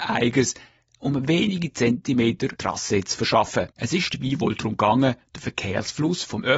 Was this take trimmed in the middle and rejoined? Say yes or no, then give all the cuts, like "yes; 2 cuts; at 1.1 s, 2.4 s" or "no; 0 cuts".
yes; 2 cuts; at 2.6 s, 3.7 s